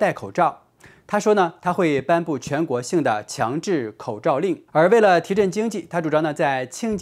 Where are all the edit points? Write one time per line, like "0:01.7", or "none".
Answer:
0:04.7